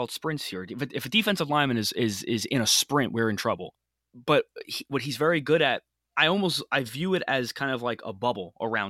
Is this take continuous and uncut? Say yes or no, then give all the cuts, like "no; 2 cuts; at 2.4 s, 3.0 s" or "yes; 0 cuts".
yes; 0 cuts